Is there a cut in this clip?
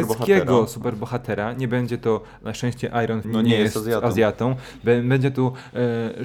yes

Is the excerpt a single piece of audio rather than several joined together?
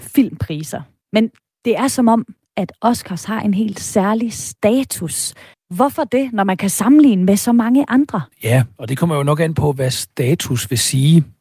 no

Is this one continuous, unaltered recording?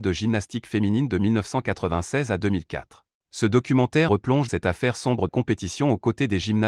no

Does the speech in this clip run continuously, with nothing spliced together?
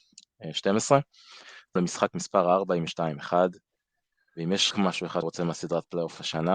no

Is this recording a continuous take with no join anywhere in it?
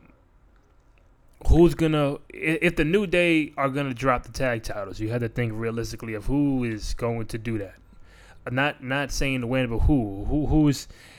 yes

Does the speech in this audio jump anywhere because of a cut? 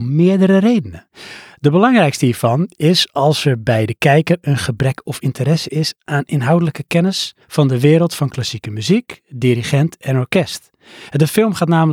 yes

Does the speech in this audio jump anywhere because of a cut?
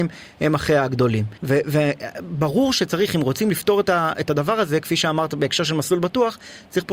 yes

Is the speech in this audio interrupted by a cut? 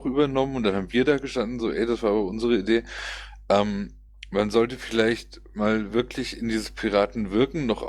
no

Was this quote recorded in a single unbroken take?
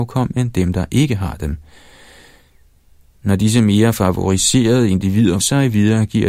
no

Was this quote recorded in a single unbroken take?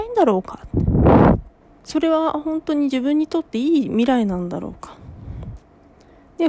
no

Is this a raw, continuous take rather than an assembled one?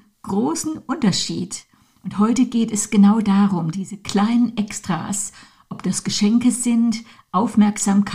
yes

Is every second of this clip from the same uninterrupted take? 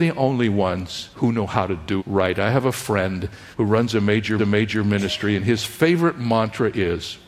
no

